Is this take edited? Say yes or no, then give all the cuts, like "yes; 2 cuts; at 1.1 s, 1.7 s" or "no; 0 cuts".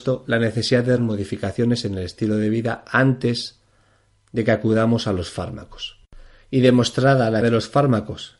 yes; 2 cuts; at 1.0 s, 7.4 s